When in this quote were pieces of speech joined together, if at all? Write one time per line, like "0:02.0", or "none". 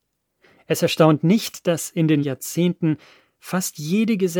0:02.2